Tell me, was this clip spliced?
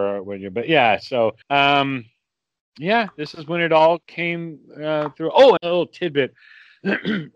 yes; 2 cuts; at 1.4 s, 5.6 s

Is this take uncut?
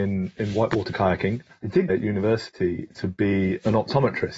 no; 2 cuts; at 1.5 s, 1.9 s

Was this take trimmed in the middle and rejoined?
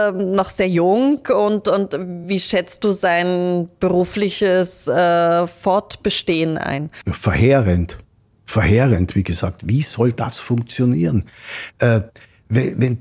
no; 0 cuts

